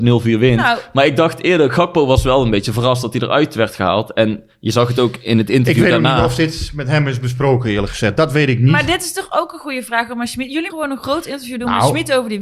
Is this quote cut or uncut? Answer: cut